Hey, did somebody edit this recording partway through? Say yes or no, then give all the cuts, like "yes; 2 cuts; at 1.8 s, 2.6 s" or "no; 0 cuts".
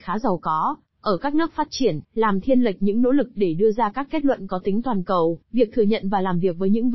yes; 2 cuts; at 2.0 s, 5.4 s